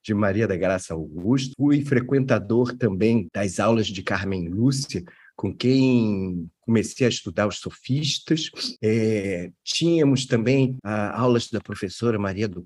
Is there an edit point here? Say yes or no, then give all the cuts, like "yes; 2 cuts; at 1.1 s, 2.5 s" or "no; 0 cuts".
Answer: no; 0 cuts